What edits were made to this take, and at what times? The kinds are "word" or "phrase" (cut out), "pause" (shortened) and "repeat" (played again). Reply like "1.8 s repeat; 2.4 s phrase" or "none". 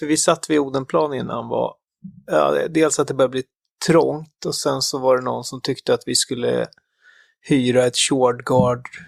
none